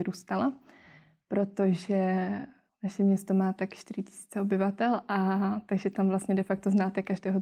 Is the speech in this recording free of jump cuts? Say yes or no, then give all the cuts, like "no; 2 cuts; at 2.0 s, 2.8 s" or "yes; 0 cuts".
yes; 0 cuts